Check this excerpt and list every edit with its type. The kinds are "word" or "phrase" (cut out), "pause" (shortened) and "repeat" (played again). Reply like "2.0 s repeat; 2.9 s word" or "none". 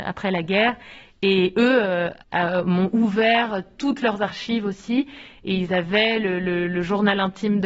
2.2 s pause